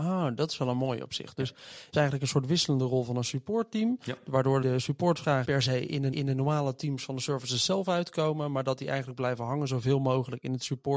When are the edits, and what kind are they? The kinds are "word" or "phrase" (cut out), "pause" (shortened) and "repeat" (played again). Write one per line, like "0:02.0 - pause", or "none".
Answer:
0:01.9 - word
0:04.6 - word
0:05.4 - word
0:06.1 - repeat